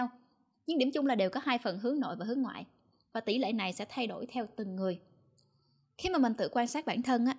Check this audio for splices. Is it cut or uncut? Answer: uncut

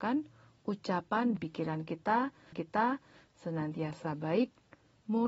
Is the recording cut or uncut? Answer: cut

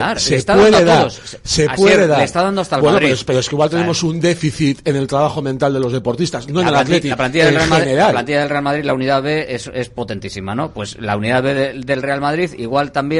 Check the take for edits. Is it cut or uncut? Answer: uncut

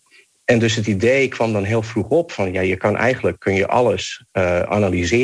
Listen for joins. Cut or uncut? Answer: cut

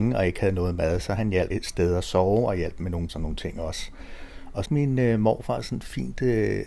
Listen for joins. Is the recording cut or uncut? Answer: cut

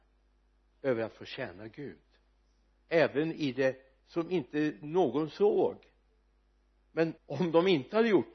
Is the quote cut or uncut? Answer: cut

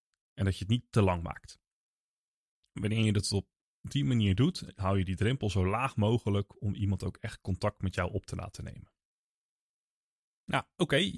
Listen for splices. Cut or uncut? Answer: uncut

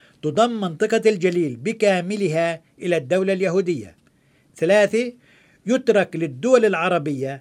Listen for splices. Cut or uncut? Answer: uncut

